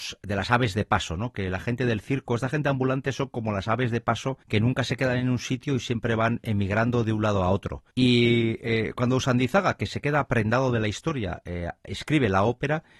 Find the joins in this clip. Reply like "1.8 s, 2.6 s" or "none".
4.4 s, 7.9 s